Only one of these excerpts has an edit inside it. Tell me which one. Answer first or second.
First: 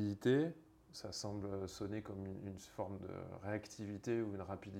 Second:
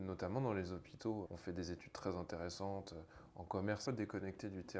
second